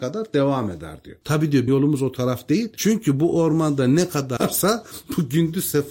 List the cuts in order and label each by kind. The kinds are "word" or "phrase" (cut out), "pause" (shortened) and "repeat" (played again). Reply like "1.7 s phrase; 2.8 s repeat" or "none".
1.7 s word; 4.4 s word